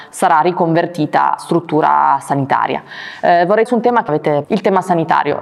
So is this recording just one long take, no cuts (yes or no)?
no